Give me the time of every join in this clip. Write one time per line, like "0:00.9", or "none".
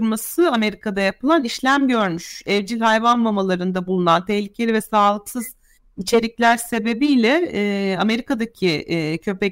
none

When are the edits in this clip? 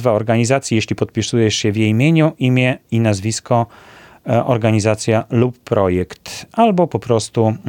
none

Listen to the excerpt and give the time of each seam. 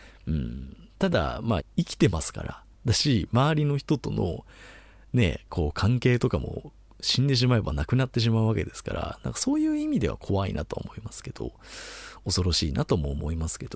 0:01.6
0:02.7

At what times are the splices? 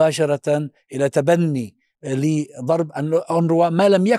0:01.9

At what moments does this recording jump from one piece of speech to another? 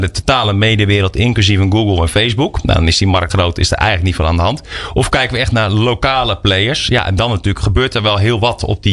0:03.3

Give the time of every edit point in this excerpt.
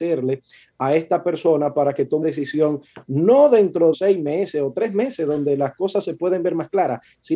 0:02.2
0:03.9

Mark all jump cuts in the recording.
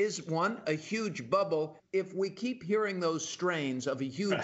0:01.8

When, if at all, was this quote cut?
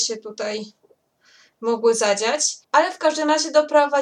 0:02.6

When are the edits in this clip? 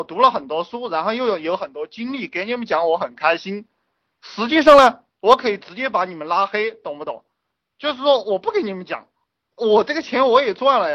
none

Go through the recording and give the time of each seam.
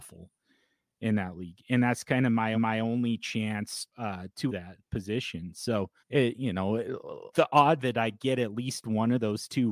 0:02.5
0:03.9
0:04.5
0:06.0
0:07.3
0:07.8

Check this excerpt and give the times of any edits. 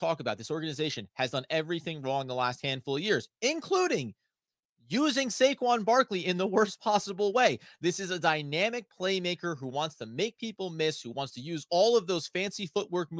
none

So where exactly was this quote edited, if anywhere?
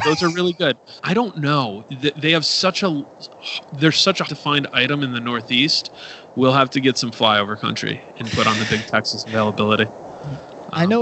0:01.0
0:04.3

